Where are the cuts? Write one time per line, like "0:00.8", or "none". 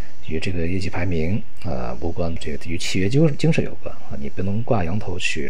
0:02.4